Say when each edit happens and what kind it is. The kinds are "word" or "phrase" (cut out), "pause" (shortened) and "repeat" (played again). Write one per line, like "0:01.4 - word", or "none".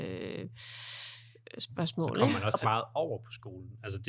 0:02.6 - phrase